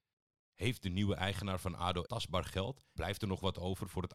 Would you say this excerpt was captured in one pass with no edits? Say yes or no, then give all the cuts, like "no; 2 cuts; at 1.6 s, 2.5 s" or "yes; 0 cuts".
no; 2 cuts; at 2.0 s, 3.0 s